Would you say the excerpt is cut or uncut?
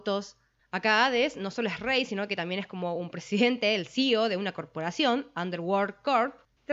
uncut